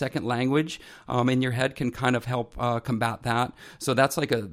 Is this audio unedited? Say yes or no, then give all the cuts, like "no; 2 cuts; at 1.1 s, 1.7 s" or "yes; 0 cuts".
yes; 0 cuts